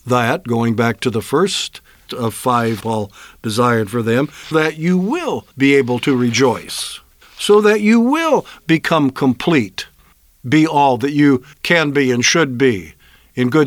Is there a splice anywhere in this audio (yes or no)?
yes